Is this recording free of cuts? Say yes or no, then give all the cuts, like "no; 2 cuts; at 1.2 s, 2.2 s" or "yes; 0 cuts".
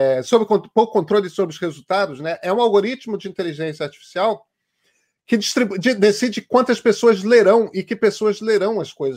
yes; 0 cuts